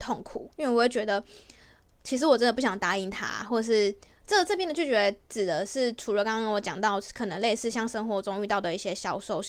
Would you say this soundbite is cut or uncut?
cut